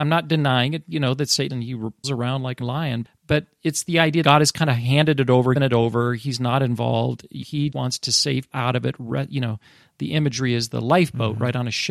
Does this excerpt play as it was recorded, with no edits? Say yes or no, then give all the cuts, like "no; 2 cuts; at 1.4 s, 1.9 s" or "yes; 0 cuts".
no; 9 cuts; at 1.5 s, 2.0 s, 2.6 s, 3.0 s, 4.2 s, 5.6 s, 7.4 s, 7.7 s, 8.5 s